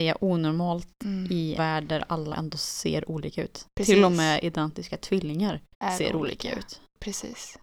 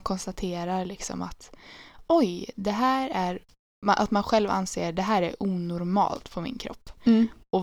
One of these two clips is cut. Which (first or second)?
first